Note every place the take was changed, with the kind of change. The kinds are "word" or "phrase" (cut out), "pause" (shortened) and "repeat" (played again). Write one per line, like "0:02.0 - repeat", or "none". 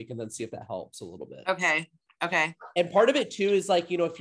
none